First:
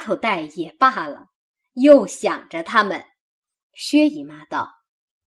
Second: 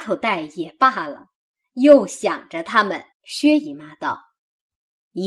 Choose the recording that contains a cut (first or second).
second